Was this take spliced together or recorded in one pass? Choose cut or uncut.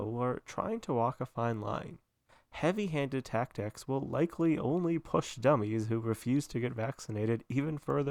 uncut